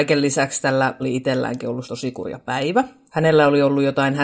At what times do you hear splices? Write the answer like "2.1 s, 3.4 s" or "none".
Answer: 1.0 s, 1.8 s